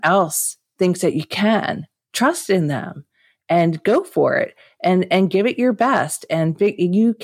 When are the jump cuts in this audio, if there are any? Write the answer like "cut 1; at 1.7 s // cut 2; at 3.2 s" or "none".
none